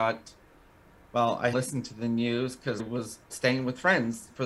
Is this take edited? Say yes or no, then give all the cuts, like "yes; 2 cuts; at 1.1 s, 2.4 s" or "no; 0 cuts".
yes; 3 cuts; at 1.5 s, 2.8 s, 3.3 s